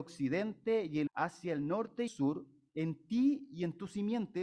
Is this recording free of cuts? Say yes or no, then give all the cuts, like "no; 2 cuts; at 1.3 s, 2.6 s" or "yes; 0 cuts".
no; 2 cuts; at 1.1 s, 2.1 s